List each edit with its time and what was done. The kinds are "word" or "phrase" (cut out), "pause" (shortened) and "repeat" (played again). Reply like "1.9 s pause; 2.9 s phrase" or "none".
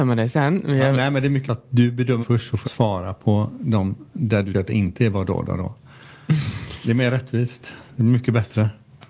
1.5 s word; 2.2 s word; 2.6 s word; 4.5 s word